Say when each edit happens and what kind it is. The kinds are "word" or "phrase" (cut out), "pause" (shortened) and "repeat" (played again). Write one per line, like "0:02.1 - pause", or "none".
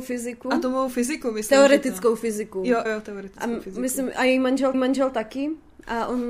0:02.8 - word
0:04.7 - repeat